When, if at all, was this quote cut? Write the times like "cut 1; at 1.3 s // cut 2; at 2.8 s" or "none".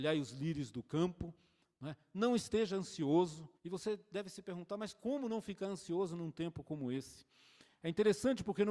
cut 1; at 3.6 s